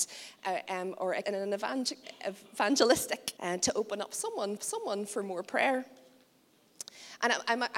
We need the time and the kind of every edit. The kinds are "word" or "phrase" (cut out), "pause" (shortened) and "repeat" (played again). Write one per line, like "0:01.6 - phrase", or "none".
0:01.2 - phrase
0:03.4 - phrase
0:04.6 - repeat